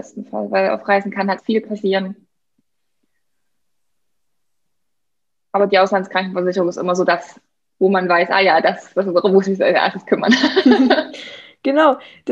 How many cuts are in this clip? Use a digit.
1